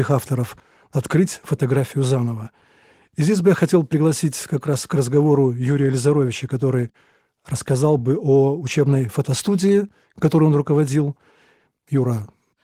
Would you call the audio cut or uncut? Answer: uncut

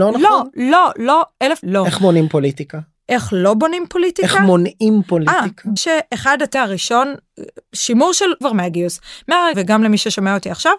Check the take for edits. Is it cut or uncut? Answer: cut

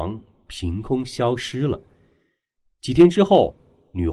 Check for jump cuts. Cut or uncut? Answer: uncut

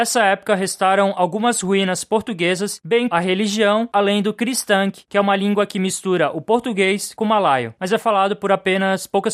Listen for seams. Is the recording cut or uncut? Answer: cut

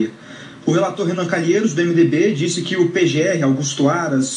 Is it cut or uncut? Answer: uncut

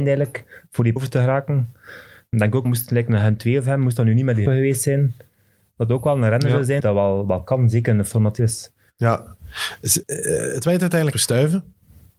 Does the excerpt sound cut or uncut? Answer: cut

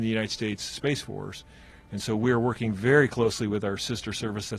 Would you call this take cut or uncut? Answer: uncut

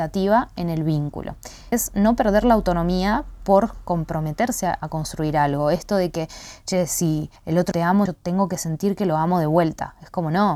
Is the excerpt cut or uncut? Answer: cut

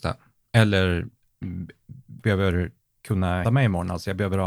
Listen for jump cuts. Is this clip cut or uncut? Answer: cut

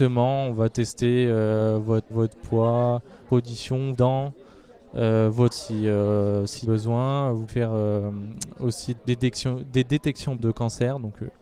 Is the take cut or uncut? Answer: cut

